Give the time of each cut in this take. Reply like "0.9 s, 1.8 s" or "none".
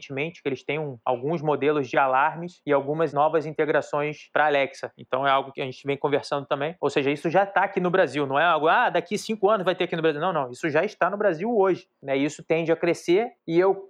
none